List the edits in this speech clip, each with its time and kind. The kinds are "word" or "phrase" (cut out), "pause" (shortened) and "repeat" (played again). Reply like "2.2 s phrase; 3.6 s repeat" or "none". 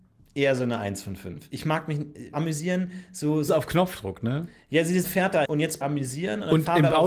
2.3 s word; 3.5 s word; 5.0 s word; 5.4 s word; 5.8 s word